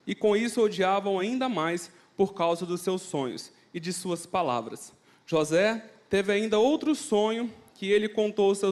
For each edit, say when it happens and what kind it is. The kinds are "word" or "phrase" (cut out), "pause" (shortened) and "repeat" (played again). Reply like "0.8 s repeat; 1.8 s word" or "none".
none